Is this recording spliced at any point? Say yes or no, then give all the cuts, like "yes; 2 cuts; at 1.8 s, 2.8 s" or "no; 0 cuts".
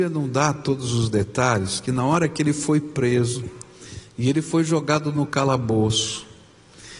no; 0 cuts